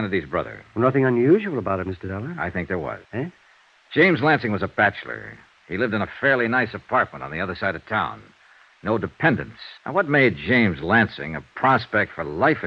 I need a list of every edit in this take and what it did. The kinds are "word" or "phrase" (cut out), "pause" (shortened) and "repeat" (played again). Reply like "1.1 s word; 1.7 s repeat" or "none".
3.0 s pause; 9.8 s pause